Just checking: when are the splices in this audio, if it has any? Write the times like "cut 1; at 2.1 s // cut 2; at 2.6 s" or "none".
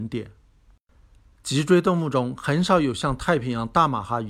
none